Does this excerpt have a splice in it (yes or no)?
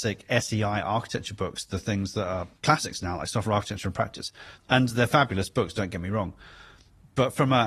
no